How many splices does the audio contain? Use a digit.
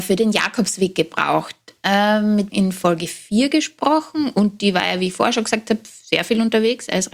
1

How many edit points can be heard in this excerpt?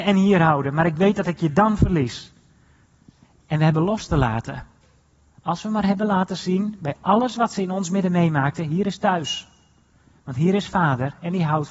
0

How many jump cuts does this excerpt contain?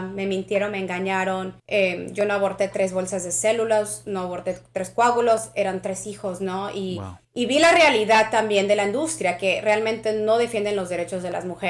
2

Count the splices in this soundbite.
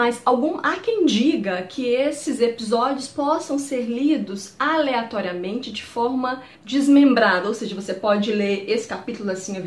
1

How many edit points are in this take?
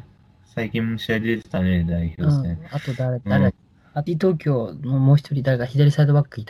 1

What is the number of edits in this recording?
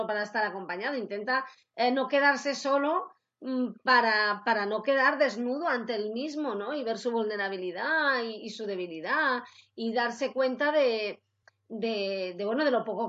0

